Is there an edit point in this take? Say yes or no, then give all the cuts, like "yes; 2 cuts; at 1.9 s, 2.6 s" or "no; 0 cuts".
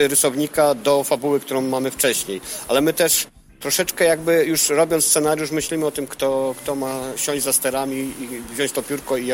no; 0 cuts